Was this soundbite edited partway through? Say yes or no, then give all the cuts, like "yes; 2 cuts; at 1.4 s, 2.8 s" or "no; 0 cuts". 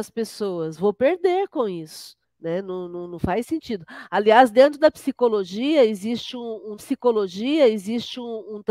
yes; 2 cuts; at 2.2 s, 6.8 s